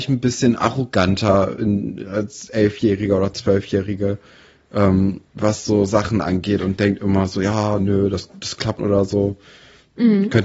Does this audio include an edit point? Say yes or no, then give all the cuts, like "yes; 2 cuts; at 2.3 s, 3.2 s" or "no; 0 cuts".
yes; 1 cut; at 8.8 s